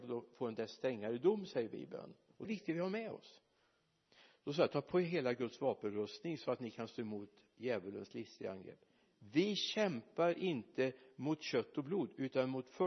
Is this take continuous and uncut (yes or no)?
no